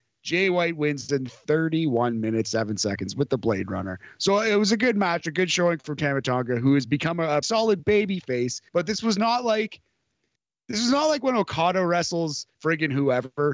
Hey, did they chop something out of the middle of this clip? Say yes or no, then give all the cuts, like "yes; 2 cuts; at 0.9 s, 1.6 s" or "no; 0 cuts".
yes; 4 cuts; at 2.4 s, 7.4 s, 8.7 s, 12.5 s